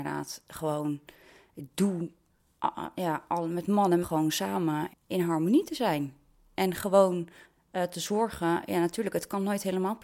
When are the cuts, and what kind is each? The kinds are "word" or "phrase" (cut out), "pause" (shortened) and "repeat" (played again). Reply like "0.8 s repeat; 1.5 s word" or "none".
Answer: 4.0 s phrase; 4.9 s word; 7.4 s pause